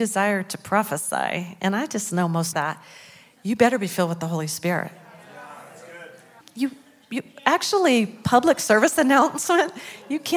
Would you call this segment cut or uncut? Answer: cut